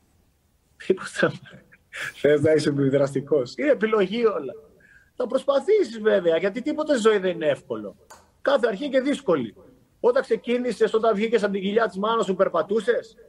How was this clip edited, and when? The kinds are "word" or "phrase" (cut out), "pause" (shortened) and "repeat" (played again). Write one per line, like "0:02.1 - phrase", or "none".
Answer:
none